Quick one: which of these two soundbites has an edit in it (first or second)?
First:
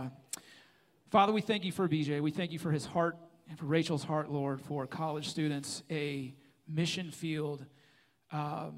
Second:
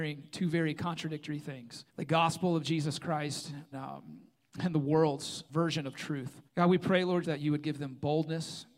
second